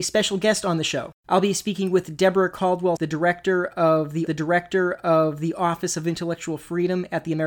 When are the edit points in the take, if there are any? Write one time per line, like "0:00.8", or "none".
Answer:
0:01.2
0:03.0
0:04.3